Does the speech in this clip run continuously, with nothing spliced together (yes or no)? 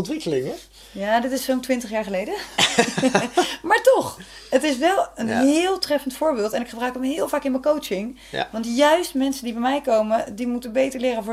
yes